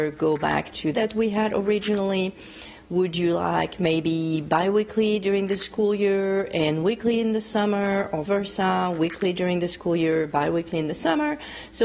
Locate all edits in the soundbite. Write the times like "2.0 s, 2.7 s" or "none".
0.9 s, 8.2 s